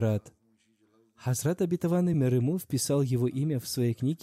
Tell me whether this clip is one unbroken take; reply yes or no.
no